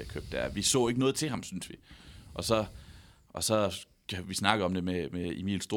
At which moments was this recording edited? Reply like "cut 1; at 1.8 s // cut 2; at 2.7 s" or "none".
none